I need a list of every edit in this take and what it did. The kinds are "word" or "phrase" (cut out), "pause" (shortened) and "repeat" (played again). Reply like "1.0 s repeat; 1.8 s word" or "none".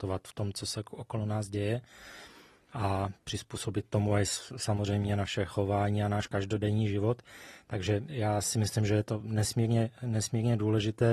none